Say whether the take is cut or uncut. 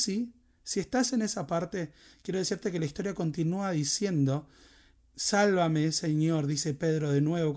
uncut